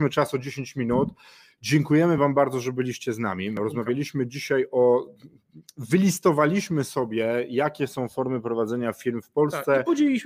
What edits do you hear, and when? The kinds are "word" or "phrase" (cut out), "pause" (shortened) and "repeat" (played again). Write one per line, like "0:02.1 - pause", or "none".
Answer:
none